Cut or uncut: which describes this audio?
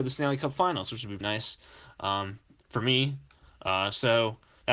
cut